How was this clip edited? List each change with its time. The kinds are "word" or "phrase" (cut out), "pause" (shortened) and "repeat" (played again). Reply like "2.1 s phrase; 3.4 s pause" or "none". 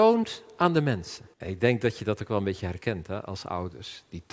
1.3 s pause